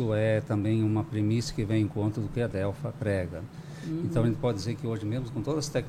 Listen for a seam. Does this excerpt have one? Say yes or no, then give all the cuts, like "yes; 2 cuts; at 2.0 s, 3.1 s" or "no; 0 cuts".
no; 0 cuts